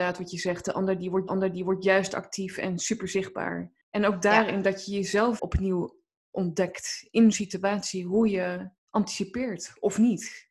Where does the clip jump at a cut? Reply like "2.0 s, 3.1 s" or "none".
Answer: 1.3 s, 3.8 s, 5.4 s, 7.3 s, 8.8 s